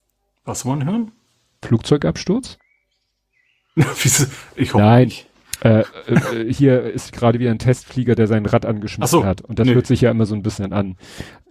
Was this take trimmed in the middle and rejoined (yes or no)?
no